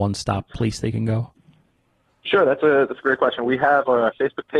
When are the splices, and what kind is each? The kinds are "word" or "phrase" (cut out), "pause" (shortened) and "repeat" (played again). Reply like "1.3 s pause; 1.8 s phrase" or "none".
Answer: none